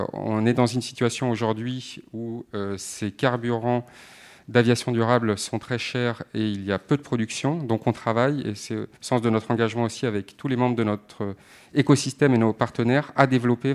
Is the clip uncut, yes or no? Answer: no